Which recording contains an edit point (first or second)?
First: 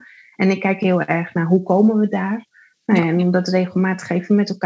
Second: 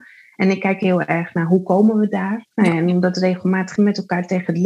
second